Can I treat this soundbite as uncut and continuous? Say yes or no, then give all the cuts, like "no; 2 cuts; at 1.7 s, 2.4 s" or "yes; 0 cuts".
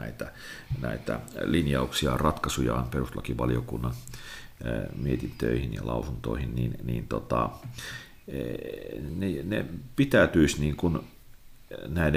yes; 0 cuts